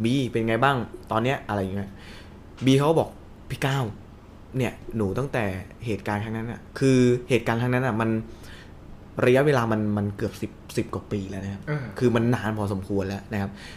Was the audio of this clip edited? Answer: no; 0 cuts

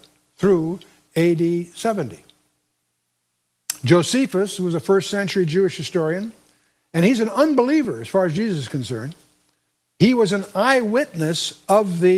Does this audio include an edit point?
no; 0 cuts

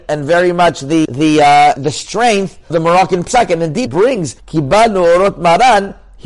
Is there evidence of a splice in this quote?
yes; 5 cuts; at 1.0 s, 1.8 s, 2.7 s, 3.9 s, 4.4 s

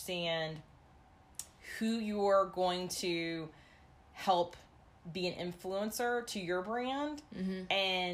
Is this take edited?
no; 0 cuts

